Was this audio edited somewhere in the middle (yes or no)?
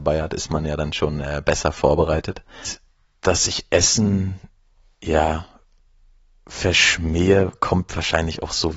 no